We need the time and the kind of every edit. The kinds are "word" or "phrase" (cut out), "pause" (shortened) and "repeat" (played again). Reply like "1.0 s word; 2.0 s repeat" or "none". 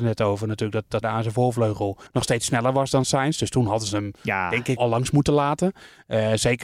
1.0 s phrase; 2.1 s pause; 4.8 s word